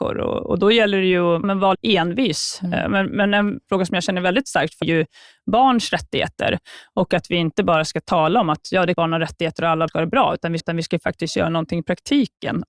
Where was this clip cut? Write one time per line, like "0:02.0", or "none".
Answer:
0:01.4
0:01.7
0:04.8
0:08.9
0:09.9
0:10.6